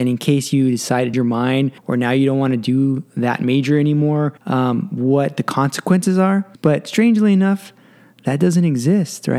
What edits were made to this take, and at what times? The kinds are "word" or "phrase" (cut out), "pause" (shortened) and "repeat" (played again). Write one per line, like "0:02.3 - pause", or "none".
0:01.1 - word
0:01.8 - pause
0:04.4 - pause
0:06.5 - pause